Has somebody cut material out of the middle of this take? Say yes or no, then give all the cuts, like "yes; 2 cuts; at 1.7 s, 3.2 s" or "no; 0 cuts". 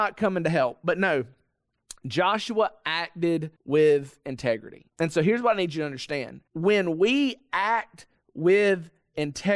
yes; 3 cuts; at 3.6 s, 4.9 s, 6.5 s